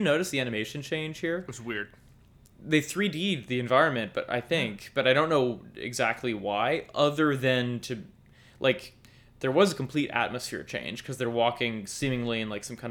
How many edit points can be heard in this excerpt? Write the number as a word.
zero